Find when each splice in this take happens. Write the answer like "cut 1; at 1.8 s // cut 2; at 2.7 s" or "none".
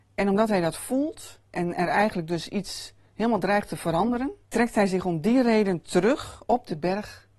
cut 1; at 1.4 s // cut 2; at 4.4 s